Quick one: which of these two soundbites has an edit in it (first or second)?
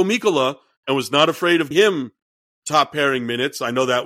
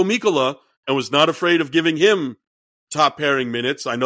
first